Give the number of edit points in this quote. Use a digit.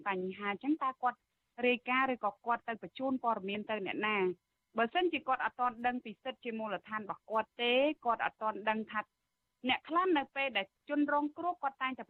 0